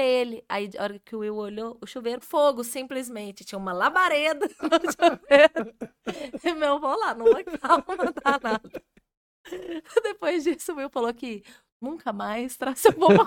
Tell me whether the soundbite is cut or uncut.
cut